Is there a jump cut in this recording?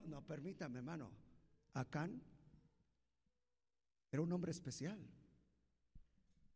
no; 0 cuts

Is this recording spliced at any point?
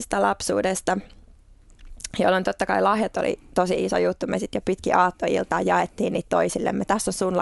no; 0 cuts

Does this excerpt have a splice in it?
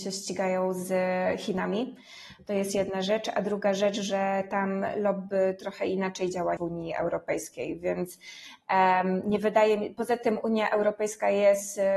yes; 1 cut; at 6.6 s

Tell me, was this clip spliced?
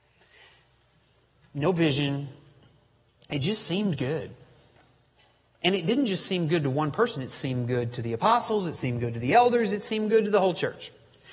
no; 0 cuts

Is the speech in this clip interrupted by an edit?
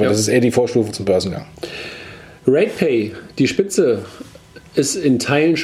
no; 0 cuts

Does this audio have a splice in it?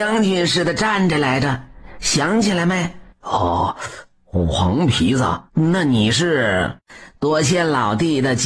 yes; 2 cuts; at 3.1 s, 5.5 s

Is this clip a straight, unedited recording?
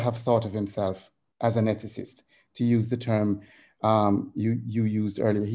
yes; 0 cuts

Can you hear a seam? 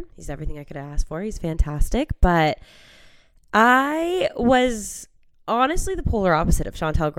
no; 0 cuts

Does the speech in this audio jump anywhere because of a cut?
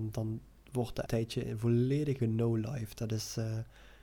yes; 2 cuts; at 1.1 s, 2.2 s

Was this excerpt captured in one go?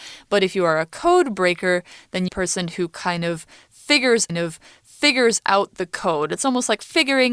no; 2 cuts; at 2.3 s, 4.3 s

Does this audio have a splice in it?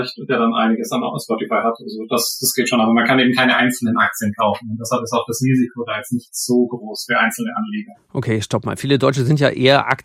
no; 0 cuts

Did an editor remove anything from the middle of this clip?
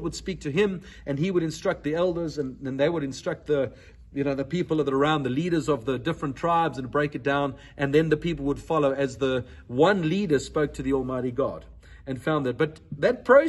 no; 0 cuts

